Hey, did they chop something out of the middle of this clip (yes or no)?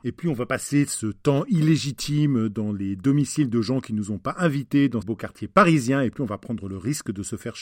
yes